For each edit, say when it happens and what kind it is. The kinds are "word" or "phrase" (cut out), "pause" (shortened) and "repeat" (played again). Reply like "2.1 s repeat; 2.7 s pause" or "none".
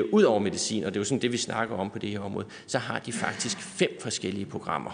none

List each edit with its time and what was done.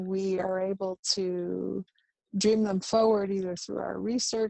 none

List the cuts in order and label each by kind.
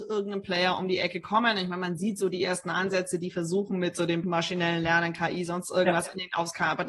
4.2 s word

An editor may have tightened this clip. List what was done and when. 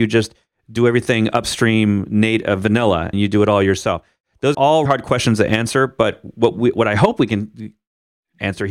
3.1 s word; 4.5 s word; 4.9 s word

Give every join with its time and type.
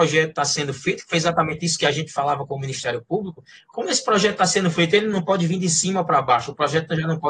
none

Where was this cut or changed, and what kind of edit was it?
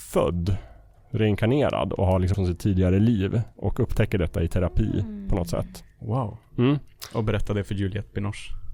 2.3 s word; 3.5 s pause

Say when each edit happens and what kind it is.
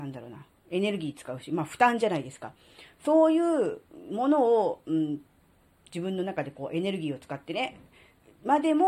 none

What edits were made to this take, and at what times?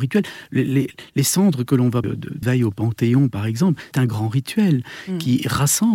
2.0 s word; 2.4 s word; 3.9 s word

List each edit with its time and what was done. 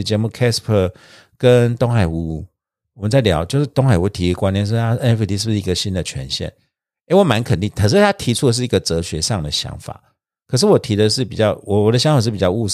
none

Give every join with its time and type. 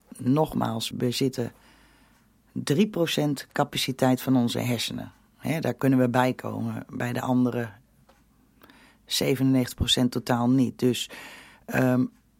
0.9 s word

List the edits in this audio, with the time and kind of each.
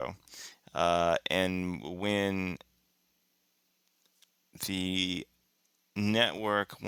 none

